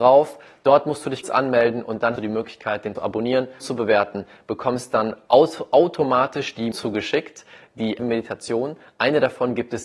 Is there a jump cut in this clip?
yes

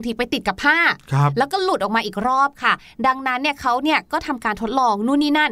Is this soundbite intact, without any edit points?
yes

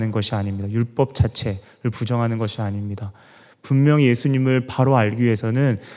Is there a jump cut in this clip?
no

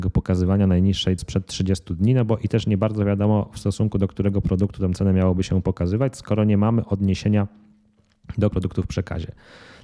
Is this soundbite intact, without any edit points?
no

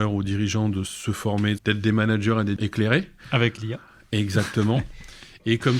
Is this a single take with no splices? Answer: no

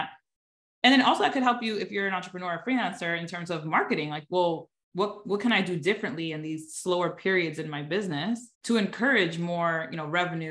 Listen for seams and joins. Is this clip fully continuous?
no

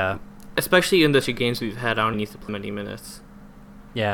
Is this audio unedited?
no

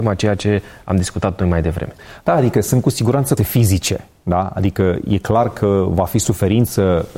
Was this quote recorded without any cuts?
no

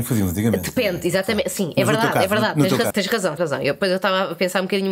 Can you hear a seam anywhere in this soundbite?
yes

